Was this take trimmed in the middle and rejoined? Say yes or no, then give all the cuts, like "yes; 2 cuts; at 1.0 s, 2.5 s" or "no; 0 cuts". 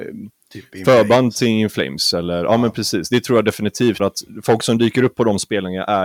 yes; 1 cut; at 4.0 s